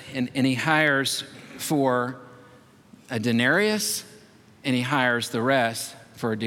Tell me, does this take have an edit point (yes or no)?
no